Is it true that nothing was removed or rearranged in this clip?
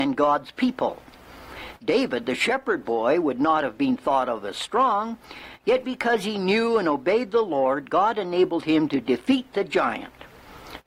yes; 0 cuts

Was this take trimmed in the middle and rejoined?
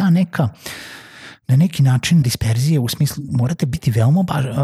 yes; 2 cuts; at 2.2 s, 3.3 s

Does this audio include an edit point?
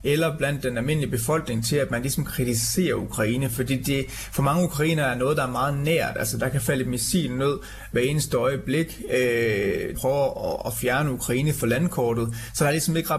yes; 1 cut; at 9.9 s

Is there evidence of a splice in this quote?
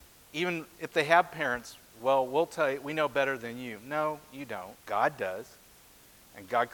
yes; 1 cut; at 4.8 s

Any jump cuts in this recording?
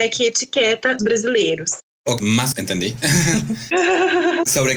yes; 3 cuts; at 1.0 s, 2.2 s, 2.5 s

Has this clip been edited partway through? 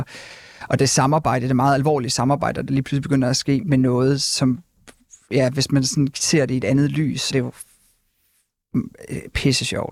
yes; 2 cuts; at 3.6 s, 7.3 s

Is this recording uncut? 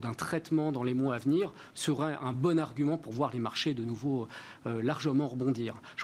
yes; 0 cuts

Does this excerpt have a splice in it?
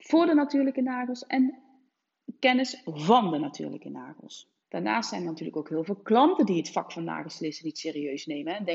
yes; 1 cut; at 4.6 s

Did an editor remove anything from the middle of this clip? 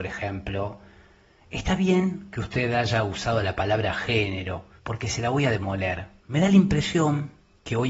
yes; 2 cuts; at 4.8 s, 6.2 s

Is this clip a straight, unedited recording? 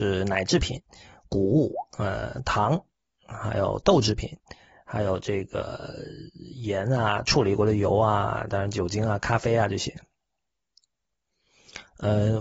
yes; 0 cuts

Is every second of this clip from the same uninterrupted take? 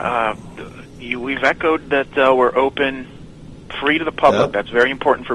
yes; 0 cuts

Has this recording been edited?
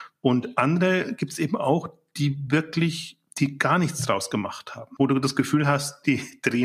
no; 0 cuts

